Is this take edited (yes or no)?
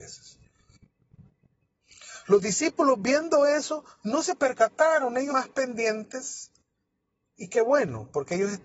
yes